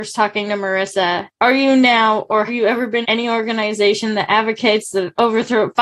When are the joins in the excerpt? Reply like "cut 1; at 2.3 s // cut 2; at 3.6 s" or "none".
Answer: cut 1; at 2.5 s // cut 2; at 3.0 s